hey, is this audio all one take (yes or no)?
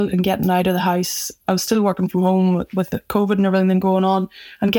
yes